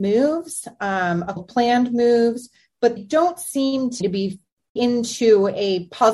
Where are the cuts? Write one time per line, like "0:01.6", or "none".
0:01.4
0:03.0
0:04.0
0:04.8